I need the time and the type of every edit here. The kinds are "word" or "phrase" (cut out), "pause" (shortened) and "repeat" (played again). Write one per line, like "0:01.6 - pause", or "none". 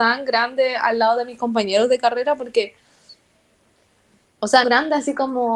0:04.6 - word

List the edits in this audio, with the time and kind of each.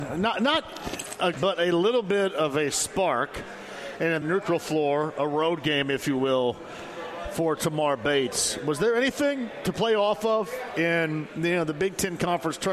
0:01.3 - phrase
0:04.2 - phrase

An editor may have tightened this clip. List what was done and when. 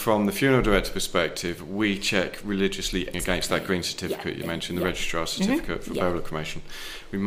0:03.1 - word

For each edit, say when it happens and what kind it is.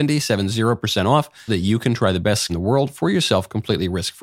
0:01.5 - word
0:02.5 - word

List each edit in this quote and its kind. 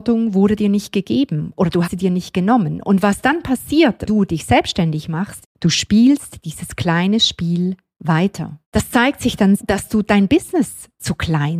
0:01.8 - word
0:04.1 - word
0:05.4 - word
0:08.6 - pause
0:09.6 - word

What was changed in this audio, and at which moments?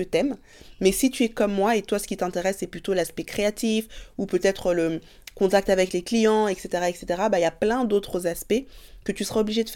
none

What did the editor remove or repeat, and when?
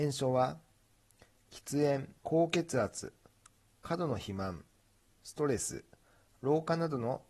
0:02.2 - pause

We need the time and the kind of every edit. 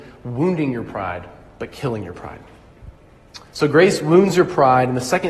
none

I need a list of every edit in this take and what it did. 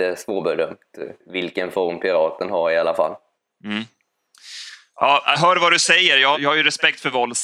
0:01.2 - pause
0:03.4 - pause
0:05.3 - word
0:06.3 - word

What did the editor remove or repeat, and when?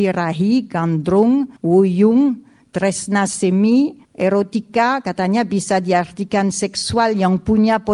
0:01.6 - pause
0:04.0 - pause

